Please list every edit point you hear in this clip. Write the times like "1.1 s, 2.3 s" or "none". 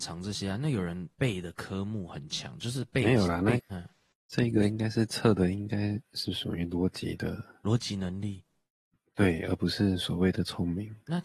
1.1 s, 3.6 s